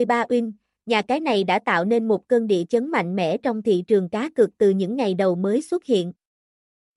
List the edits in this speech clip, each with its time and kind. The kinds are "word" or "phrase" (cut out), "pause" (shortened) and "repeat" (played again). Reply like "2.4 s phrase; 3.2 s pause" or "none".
none

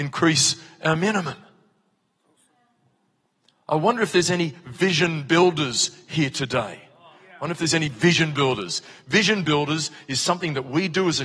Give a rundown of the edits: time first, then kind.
none

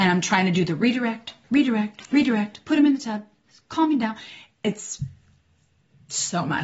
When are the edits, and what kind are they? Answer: none

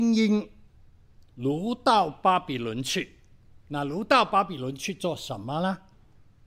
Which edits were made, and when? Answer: 1.3 s pause; 3.6 s pause

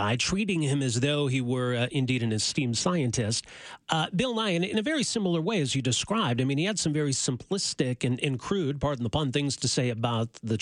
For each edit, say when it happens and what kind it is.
none

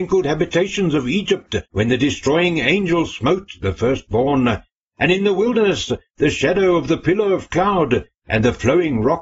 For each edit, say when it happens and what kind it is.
1.7 s pause

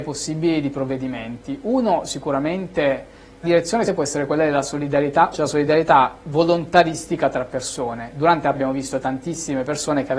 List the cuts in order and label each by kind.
3.4 s word; 3.8 s word; 5.3 s word; 8.5 s word

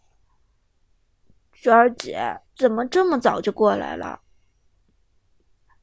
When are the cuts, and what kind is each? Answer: 2.5 s pause

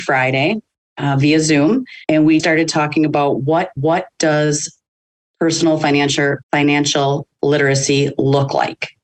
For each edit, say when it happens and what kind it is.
2.0 s pause; 2.4 s word; 3.8 s repeat; 6.4 s pause

